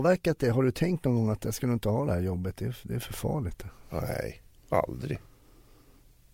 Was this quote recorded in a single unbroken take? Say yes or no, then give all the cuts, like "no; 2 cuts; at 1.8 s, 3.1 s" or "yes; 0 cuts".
yes; 0 cuts